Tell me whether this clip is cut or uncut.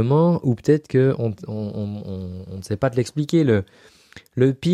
uncut